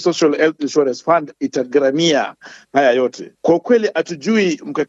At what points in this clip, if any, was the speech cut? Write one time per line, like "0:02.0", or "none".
0:03.4